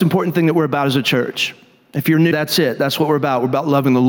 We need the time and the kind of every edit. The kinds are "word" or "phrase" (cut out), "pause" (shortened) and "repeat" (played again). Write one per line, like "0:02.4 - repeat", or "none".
0:02.3 - word